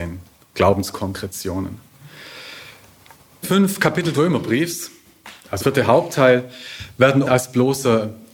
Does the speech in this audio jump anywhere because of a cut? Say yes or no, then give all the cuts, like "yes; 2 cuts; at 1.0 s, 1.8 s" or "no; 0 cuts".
yes; 4 cuts; at 3.4 s, 4.1 s, 5.6 s, 7.2 s